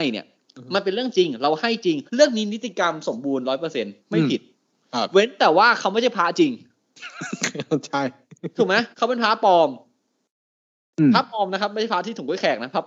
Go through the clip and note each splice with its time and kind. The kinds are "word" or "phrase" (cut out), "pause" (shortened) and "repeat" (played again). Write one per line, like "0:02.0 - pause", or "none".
0:02.1 - pause
0:04.0 - pause
0:08.9 - pause